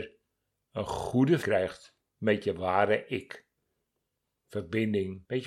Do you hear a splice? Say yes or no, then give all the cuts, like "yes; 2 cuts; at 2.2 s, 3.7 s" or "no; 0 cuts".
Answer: yes; 1 cut; at 1.4 s